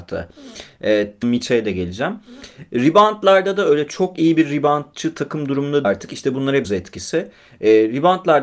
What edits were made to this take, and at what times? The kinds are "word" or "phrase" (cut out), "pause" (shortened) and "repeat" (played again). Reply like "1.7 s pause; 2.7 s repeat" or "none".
1.2 s phrase; 5.8 s word; 6.6 s phrase

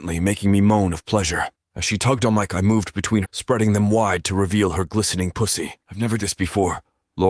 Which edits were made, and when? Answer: 1.5 s pause; 2.5 s word; 3.2 s phrase; 5.8 s pause; 6.2 s phrase

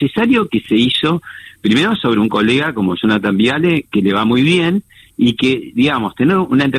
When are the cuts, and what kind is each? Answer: none

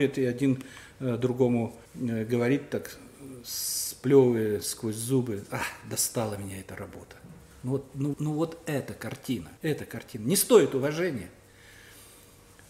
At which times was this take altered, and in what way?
1.8 s pause; 8.1 s word; 9.6 s pause

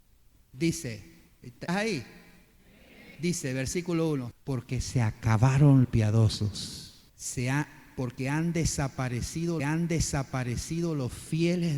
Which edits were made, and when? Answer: 1.7 s word; 3.1 s pause; 4.3 s phrase; 5.8 s word; 7.1 s pause; 9.6 s repeat

